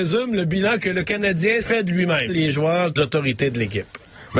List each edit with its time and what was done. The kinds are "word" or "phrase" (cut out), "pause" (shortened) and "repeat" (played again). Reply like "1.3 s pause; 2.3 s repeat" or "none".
1.6 s word; 2.3 s word; 3.0 s word